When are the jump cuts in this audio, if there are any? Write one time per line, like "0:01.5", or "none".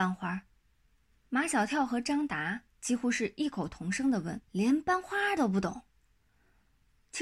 0:01.0
0:04.4

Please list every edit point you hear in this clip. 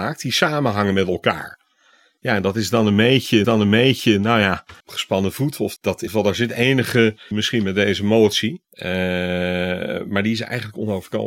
0:03.4
0:04.8
0:05.8
0:06.1
0:07.3
0:08.6

